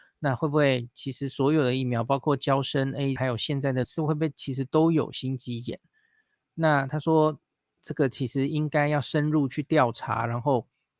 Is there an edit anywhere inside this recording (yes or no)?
yes